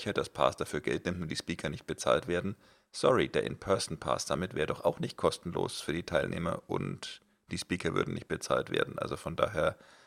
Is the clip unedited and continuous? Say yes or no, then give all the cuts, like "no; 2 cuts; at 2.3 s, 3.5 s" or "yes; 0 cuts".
yes; 0 cuts